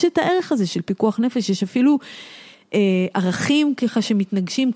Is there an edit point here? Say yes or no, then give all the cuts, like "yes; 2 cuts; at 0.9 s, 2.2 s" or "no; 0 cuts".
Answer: no; 0 cuts